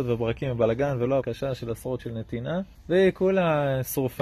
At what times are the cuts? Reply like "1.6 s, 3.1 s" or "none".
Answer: 1.2 s, 2.0 s, 2.7 s